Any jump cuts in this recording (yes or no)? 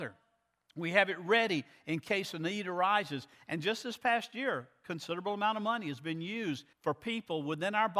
yes